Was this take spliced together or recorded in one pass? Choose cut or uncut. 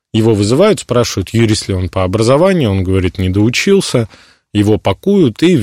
uncut